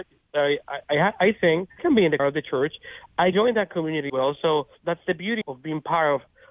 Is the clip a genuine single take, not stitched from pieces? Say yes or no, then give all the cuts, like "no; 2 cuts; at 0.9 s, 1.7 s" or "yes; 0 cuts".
no; 6 cuts; at 1.8 s, 2.2 s, 3.3 s, 4.1 s, 4.7 s, 5.4 s